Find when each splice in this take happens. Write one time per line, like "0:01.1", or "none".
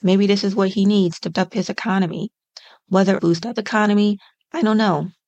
0:01.3
0:03.2
0:03.6